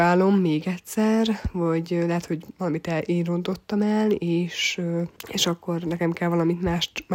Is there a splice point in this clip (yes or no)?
yes